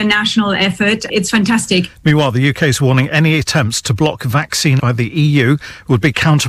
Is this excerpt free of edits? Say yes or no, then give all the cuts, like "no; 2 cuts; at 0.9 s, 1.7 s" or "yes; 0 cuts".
no; 2 cuts; at 1.1 s, 4.8 s